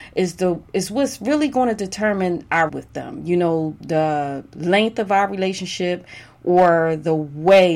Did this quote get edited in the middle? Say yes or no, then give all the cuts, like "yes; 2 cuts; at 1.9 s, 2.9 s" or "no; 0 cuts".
yes; 2 cuts; at 2.7 s, 3.8 s